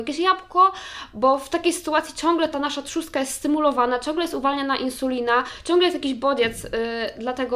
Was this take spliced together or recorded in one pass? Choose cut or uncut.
uncut